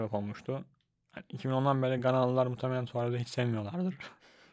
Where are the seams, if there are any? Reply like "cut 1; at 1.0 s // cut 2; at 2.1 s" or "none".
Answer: none